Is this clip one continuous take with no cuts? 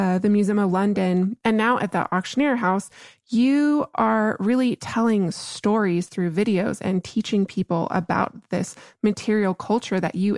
yes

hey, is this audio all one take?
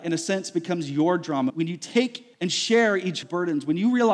no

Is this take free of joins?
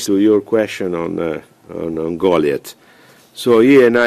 yes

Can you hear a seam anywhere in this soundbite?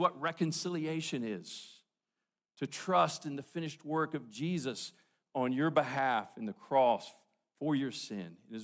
no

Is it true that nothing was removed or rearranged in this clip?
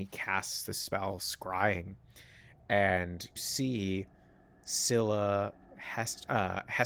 no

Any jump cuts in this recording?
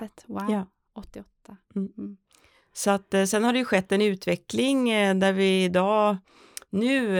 no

